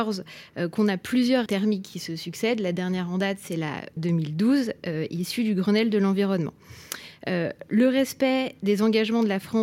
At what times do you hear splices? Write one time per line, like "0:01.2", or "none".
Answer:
0:01.5
0:04.0